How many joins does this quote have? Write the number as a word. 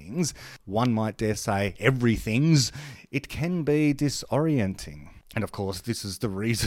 zero